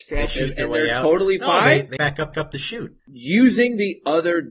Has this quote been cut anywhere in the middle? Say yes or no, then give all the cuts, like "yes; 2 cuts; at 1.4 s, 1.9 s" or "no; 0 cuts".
yes; 3 cuts; at 2.0 s, 2.3 s, 3.0 s